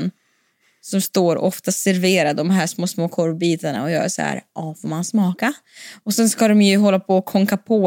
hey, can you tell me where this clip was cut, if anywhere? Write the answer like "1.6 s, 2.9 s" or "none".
2.7 s